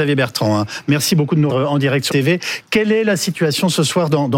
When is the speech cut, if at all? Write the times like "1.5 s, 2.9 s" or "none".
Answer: 1.5 s, 2.1 s